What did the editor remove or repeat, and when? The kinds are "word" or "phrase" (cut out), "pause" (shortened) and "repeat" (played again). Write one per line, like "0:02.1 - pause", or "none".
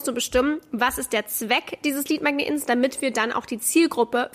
none